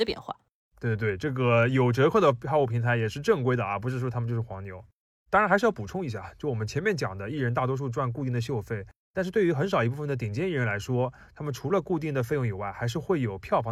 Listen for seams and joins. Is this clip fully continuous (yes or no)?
yes